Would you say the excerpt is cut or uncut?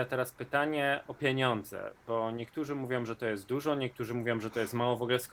uncut